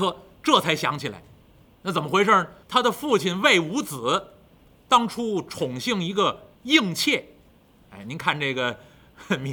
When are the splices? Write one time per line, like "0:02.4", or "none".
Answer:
0:02.6
0:06.5